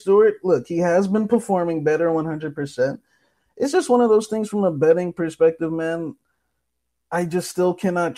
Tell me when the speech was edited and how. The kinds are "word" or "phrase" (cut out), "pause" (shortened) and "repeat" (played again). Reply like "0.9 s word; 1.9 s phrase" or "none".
none